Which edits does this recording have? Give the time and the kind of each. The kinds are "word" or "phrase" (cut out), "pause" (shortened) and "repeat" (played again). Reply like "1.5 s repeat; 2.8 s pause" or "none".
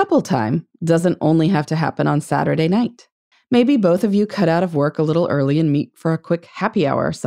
3.3 s pause